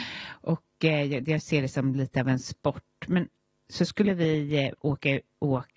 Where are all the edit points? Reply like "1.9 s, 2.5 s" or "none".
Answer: none